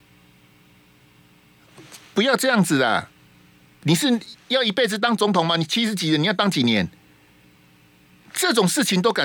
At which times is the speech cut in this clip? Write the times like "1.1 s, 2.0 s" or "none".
3.4 s